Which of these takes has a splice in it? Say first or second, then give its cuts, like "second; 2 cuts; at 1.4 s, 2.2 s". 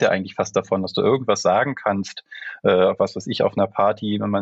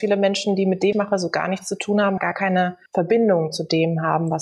second; 3 cuts; at 0.9 s, 2.2 s, 2.9 s